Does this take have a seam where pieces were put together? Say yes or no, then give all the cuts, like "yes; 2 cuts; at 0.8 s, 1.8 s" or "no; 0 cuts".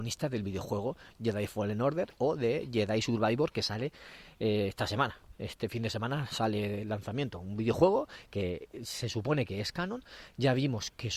no; 0 cuts